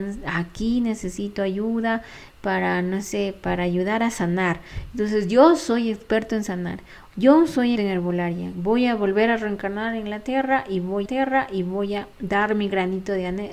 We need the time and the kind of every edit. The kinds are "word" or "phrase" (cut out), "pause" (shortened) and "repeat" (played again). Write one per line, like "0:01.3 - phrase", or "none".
0:07.8 - word
0:11.1 - repeat